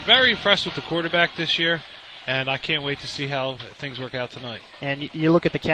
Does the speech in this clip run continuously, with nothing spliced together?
yes; 0 cuts

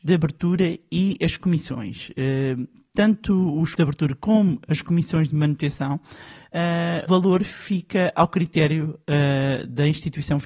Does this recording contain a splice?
yes; 2 cuts; at 3.8 s, 7.1 s

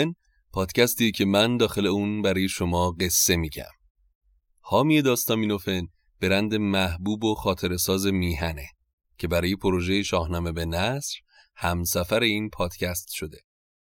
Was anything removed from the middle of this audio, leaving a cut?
no; 0 cuts

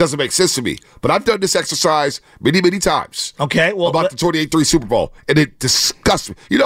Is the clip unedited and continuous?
yes; 0 cuts

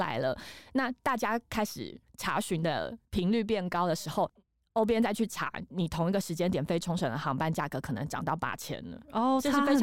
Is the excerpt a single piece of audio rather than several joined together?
no; 1 cut; at 3.0 s

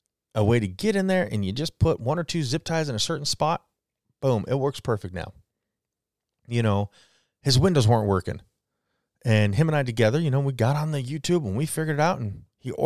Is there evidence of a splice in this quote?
no; 0 cuts

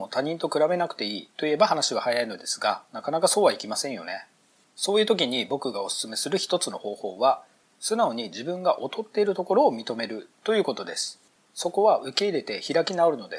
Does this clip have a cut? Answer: no; 0 cuts

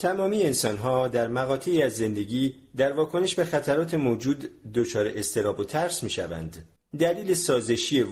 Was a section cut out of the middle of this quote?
yes; 1 cut; at 6.8 s

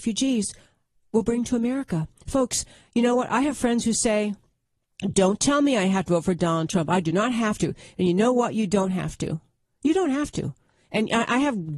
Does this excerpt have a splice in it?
no; 0 cuts

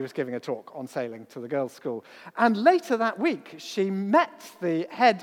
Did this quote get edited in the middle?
no; 0 cuts

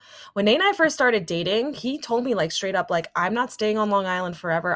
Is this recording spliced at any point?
no; 0 cuts

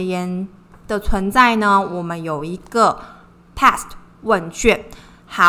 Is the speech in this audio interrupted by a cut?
no; 0 cuts

